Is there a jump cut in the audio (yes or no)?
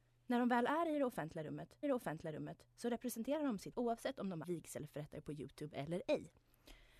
yes